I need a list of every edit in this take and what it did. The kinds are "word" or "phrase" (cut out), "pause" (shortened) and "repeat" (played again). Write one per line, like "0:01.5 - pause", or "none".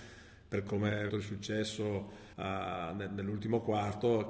0:01.1 - word
0:02.3 - pause